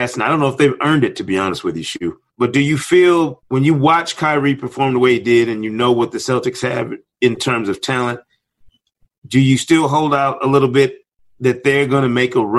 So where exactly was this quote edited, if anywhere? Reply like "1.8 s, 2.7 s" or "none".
none